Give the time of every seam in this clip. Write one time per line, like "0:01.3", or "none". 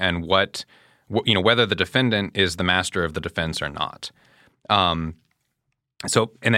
none